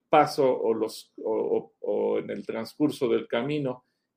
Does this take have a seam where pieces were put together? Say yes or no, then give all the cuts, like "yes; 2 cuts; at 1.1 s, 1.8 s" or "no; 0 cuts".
no; 0 cuts